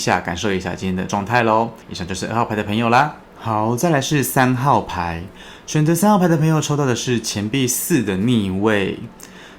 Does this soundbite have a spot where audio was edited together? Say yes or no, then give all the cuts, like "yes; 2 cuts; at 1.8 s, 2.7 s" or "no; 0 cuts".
yes; 2 cuts; at 1.8 s, 3.2 s